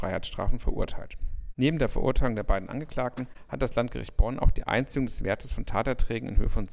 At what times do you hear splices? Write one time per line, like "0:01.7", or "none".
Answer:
none